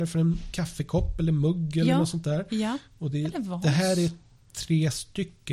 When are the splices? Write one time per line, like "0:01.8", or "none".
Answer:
none